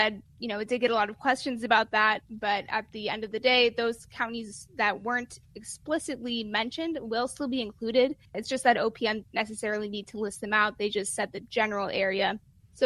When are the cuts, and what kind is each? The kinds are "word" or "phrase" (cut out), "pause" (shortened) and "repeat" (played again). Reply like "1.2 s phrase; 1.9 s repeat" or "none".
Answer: 8.2 s pause; 9.2 s word